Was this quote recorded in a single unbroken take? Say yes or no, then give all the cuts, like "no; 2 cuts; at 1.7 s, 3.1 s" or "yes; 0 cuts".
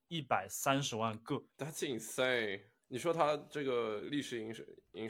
no; 1 cut; at 1.5 s